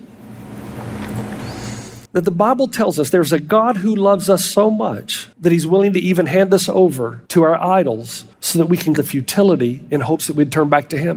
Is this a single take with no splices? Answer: no; 5 cuts; at 2.0 s, 5.3 s, 7.3 s, 8.3 s, 9.0 s

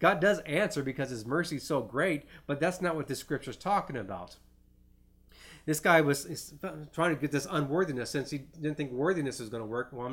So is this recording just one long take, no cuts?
yes; 0 cuts

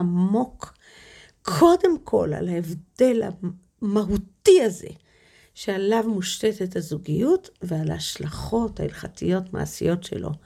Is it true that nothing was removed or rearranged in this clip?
yes; 0 cuts

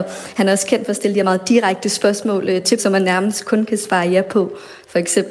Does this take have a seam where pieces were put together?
yes; 1 cut; at 2.8 s

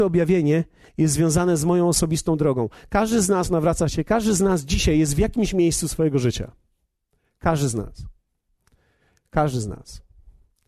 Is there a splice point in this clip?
no; 0 cuts

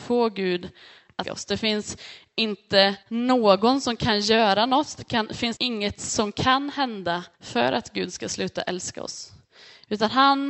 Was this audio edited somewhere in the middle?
yes; 4 cuts; at 1.2 s, 3.0 s, 5.6 s, 7.3 s

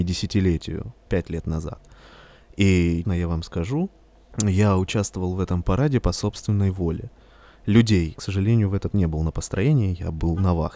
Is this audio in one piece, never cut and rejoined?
no; 5 cuts; at 1.1 s, 3.0 s, 4.0 s, 8.2 s, 8.9 s

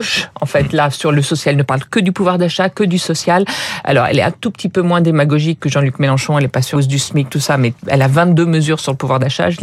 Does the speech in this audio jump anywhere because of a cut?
yes; 3 cuts; at 5.6 s, 6.8 s, 7.8 s

